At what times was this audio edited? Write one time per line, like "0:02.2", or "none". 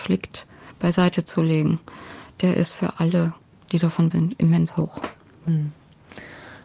0:03.7
0:04.1

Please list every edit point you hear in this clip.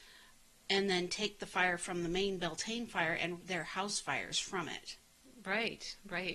0:03.4

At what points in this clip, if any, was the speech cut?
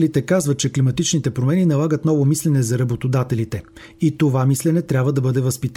none

